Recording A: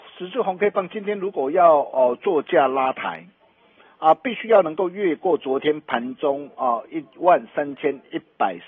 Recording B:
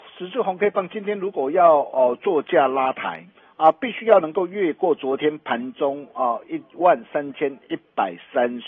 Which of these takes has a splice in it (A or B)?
B